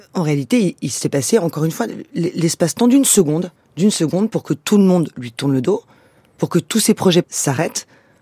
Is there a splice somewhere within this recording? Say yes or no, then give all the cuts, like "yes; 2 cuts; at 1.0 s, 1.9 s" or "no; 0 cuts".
yes; 2 cuts; at 3.6 s, 7.2 s